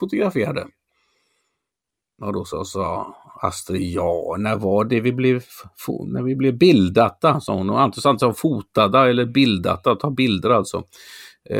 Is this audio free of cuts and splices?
yes; 0 cuts

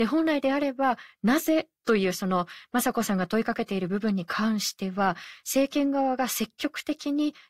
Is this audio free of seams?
no; 1 cut; at 1.7 s

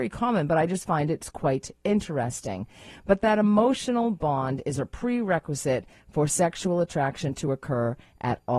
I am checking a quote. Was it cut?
no; 0 cuts

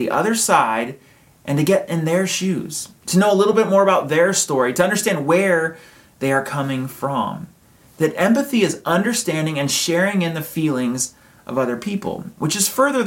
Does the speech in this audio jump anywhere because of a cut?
no; 0 cuts

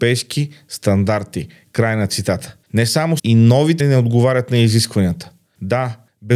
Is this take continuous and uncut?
no; 3 cuts; at 2.6 s, 3.2 s, 3.8 s

